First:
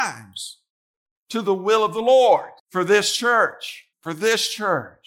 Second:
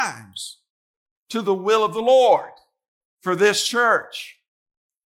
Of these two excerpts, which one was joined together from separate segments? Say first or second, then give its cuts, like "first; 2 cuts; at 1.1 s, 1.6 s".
first; 2 cuts; at 2.6 s, 3.9 s